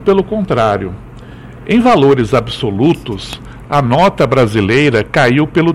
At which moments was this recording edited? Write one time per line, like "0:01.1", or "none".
none

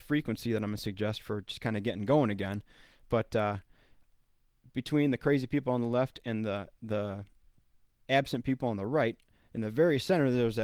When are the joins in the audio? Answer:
none

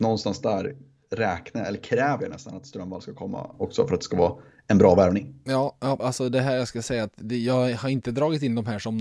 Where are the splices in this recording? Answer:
0:06.0

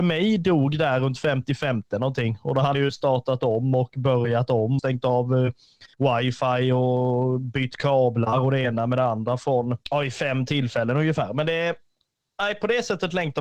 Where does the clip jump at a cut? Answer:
0:02.7
0:04.8
0:05.9
0:09.8

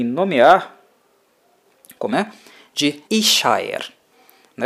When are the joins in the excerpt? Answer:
0:02.1
0:03.0

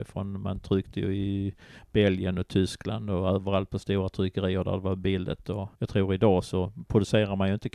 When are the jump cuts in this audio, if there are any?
0:05.7

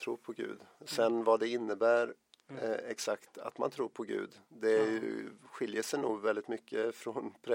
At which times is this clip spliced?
none

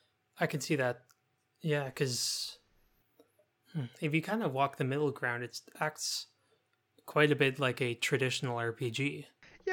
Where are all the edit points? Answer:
none

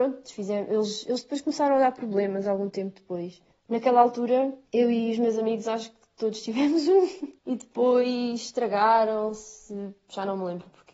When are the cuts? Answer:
0:03.5
0:04.7
0:07.4

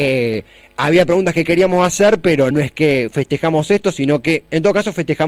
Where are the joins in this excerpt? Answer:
0:02.5

